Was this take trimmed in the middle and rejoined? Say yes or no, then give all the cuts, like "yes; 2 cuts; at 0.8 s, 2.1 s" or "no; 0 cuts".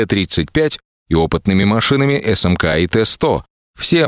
no; 0 cuts